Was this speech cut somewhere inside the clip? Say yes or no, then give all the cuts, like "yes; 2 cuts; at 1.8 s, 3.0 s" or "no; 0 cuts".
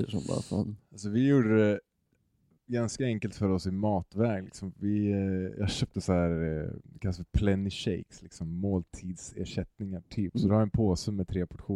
no; 0 cuts